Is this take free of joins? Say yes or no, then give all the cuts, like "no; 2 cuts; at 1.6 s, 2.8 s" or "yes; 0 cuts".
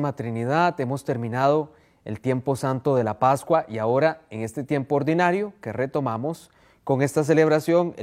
yes; 0 cuts